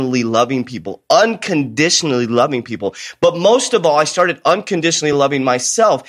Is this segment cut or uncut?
uncut